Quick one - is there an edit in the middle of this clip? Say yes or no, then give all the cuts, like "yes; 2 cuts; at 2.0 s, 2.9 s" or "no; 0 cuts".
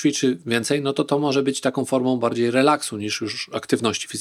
no; 0 cuts